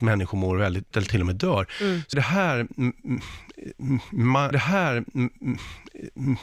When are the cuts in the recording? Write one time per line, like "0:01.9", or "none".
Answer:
0:00.9
0:02.1
0:04.5